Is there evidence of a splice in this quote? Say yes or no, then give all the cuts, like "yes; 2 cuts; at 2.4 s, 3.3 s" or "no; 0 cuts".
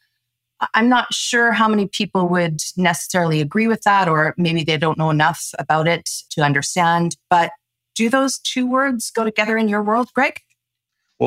no; 0 cuts